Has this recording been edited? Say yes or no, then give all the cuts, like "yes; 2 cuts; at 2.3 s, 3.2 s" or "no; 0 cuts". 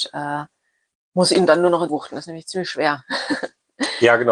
yes; 1 cut; at 1.9 s